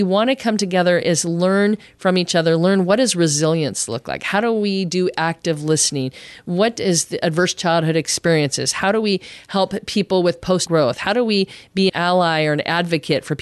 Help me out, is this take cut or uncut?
cut